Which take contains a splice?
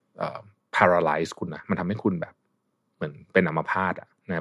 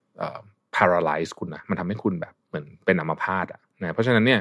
second; 1 cut; at 2.4 s

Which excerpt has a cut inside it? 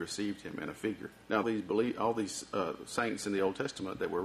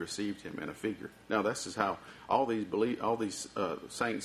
first; 1 cut; at 1.4 s

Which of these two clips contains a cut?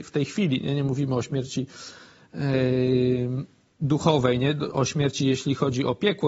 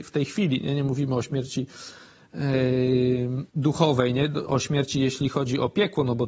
second; 1 cut; at 3.5 s

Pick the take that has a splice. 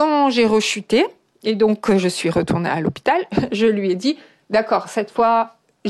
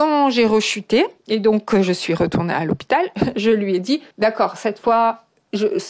second; 2 cuts; at 1.2 s, 4.1 s

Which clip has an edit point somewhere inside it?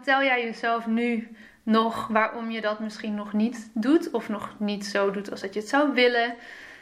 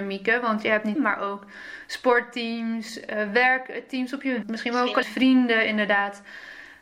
second; 3 cuts; at 1.0 s, 4.4 s, 5.0 s

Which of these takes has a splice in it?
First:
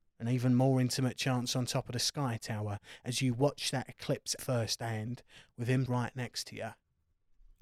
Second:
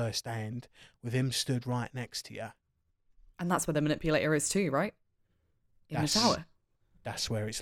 first; 2 cuts; at 4.4 s, 5.9 s

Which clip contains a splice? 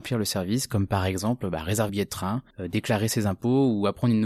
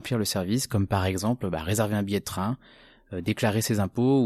first; 2 cuts; at 1.9 s, 2.5 s

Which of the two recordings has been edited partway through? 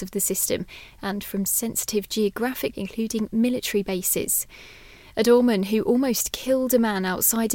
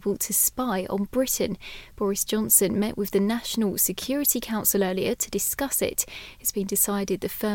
first; 1 cut; at 2.7 s

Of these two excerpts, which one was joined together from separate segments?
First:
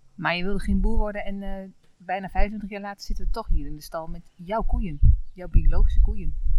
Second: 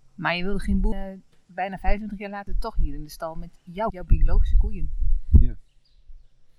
second; 3 cuts; at 0.9 s, 2.5 s, 3.9 s

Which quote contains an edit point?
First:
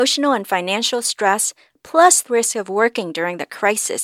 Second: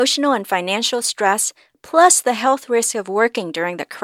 first; 1 cut; at 2.3 s

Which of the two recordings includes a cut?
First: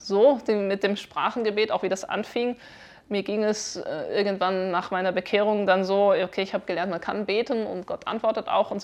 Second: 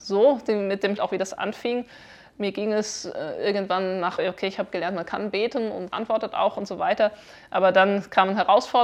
second; 3 cuts; at 1.0 s, 4.2 s, 5.9 s

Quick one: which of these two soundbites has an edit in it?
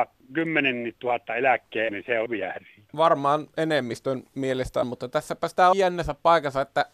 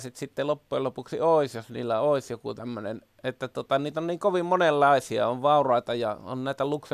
first; 5 cuts; at 1.9 s, 2.3 s, 2.9 s, 4.8 s, 5.7 s

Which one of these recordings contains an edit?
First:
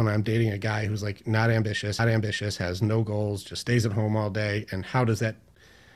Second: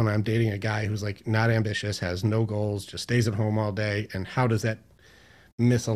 first; 1 cut; at 2.0 s

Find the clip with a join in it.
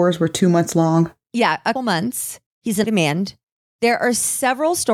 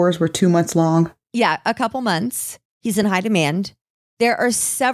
first; 2 cuts; at 1.7 s, 2.8 s

